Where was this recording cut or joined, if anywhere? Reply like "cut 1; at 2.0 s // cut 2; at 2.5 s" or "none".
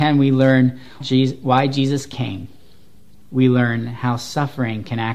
cut 1; at 1.0 s